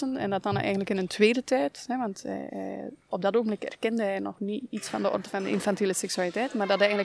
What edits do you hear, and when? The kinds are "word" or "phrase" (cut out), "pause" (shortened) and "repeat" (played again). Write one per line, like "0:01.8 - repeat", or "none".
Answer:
none